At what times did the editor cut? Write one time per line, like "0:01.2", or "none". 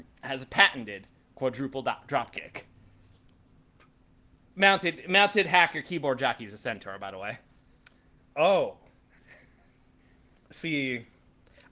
none